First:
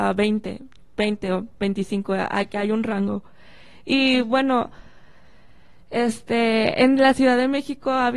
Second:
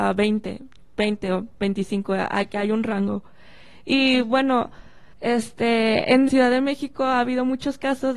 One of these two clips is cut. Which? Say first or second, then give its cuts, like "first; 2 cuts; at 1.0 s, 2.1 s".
second; 2 cuts; at 5.1 s, 6.3 s